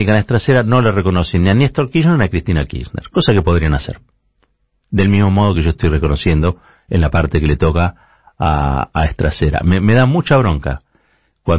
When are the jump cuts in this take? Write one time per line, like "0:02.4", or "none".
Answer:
none